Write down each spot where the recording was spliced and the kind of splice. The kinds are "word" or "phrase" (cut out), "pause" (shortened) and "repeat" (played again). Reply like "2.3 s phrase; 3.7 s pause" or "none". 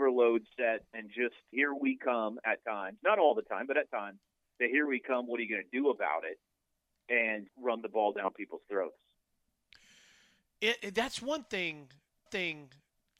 1.5 s word; 7.5 s word; 12.3 s repeat

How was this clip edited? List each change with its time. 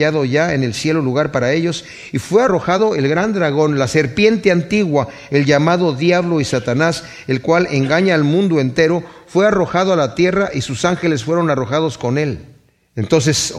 none

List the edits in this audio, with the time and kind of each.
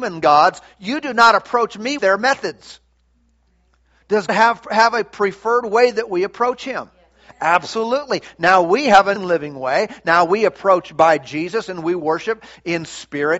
2.0 s word; 4.3 s word; 9.2 s word

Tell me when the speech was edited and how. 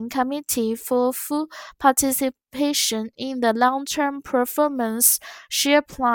none

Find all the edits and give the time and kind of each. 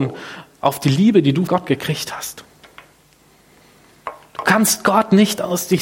1.5 s word

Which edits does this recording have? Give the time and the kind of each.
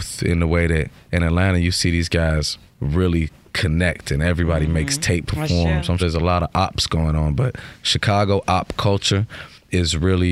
5.3 s phrase; 6.0 s word

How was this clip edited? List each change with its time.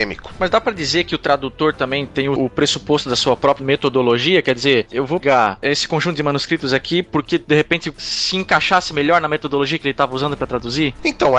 5.2 s word

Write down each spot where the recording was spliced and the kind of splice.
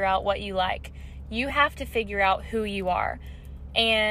none

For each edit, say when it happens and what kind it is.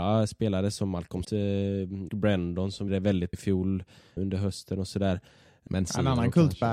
1.2 s word; 2.1 s word; 2.9 s word; 3.3 s word; 4.2 s word; 5.7 s word

